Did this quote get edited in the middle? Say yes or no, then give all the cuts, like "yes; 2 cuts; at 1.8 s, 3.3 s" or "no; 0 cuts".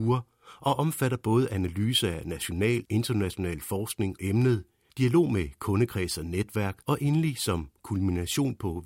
yes; 3 cuts; at 2.8 s, 4.2 s, 6.8 s